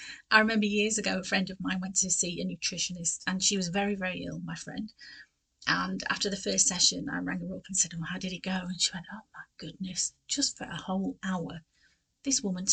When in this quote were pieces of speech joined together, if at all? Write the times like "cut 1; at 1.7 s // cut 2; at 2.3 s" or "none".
none